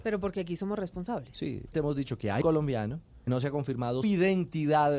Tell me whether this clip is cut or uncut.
cut